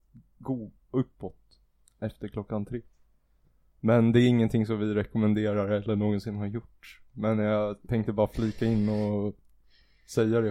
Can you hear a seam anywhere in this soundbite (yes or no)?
no